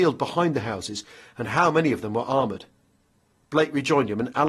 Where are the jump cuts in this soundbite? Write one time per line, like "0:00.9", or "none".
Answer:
none